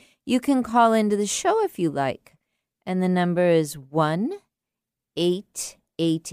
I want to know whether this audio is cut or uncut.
uncut